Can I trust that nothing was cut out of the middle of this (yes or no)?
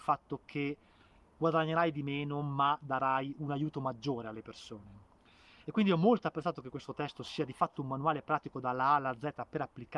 yes